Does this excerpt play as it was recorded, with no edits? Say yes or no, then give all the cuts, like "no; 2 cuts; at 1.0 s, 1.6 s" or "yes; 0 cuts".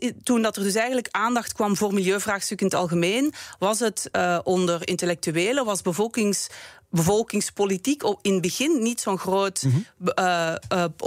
yes; 0 cuts